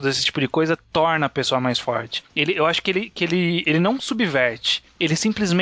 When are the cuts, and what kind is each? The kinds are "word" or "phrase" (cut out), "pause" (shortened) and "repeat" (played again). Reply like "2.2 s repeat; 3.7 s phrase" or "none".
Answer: none